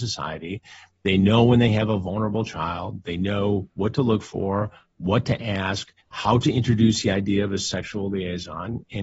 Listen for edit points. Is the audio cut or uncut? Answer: cut